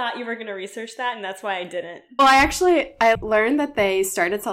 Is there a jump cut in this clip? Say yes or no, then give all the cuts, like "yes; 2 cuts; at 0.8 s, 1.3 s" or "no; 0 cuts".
yes; 2 cuts; at 2.2 s, 3.1 s